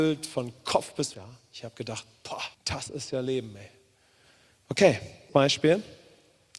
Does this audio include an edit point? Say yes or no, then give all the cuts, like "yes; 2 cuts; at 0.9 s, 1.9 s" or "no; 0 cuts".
yes; 3 cuts; at 1.1 s, 2.5 s, 5.3 s